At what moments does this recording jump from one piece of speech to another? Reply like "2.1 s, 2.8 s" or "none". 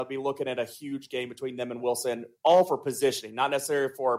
none